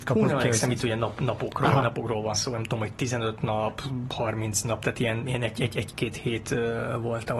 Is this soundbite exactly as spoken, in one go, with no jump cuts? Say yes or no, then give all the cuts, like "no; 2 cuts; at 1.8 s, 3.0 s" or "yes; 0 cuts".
yes; 0 cuts